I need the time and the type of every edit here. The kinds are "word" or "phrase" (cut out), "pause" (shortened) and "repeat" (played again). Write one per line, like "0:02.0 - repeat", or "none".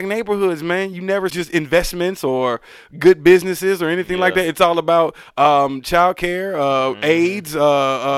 0:01.3 - phrase